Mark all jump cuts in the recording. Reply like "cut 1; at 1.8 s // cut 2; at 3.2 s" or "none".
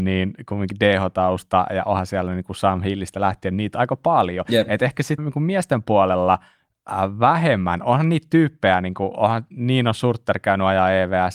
cut 1; at 5.2 s